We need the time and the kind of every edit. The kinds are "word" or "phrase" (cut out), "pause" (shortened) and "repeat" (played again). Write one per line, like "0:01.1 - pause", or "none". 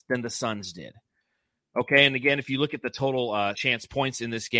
0:03.5 - word